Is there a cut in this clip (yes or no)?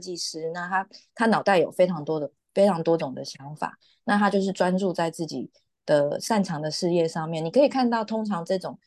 no